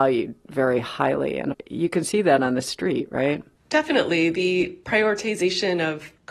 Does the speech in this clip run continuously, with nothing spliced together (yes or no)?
yes